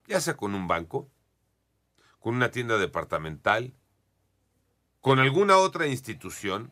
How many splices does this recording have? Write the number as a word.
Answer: zero